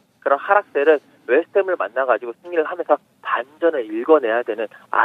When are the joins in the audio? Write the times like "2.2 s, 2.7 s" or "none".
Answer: none